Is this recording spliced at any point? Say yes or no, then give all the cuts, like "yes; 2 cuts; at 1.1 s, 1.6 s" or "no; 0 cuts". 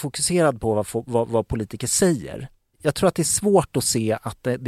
no; 0 cuts